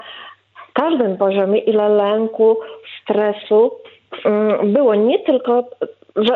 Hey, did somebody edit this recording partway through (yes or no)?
no